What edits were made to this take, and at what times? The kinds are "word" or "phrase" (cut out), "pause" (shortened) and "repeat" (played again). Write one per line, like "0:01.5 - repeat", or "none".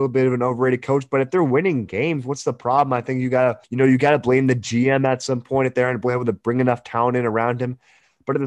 0:03.6 - pause